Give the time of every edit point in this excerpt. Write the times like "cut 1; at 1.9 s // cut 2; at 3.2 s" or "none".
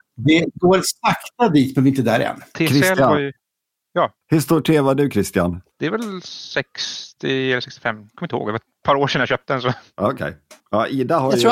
cut 1; at 4.2 s // cut 2; at 5.7 s // cut 3; at 10.6 s